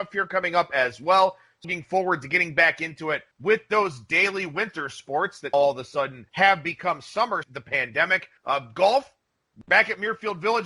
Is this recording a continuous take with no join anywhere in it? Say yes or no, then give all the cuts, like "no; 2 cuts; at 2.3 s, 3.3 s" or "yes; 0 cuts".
no; 6 cuts; at 1.6 s, 3.3 s, 5.5 s, 6.3 s, 7.4 s, 8.4 s